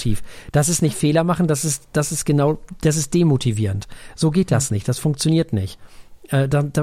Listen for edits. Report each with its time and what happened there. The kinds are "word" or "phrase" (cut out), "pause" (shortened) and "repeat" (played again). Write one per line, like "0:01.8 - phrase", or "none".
none